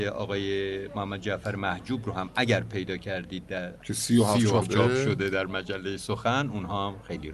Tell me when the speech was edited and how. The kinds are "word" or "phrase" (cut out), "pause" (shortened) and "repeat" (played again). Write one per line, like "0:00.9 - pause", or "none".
0:04.6 - word